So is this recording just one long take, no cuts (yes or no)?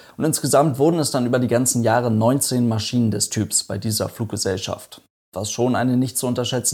yes